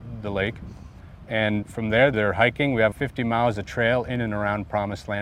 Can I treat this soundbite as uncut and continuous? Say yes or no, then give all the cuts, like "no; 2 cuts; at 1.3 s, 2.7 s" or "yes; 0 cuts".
no; 3 cuts; at 1.6 s, 2.1 s, 2.9 s